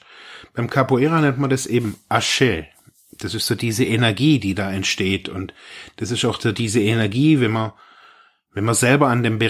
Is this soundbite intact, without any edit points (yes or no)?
yes